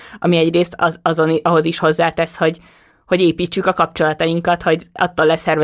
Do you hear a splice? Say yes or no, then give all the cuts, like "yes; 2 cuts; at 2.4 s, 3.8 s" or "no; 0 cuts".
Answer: no; 0 cuts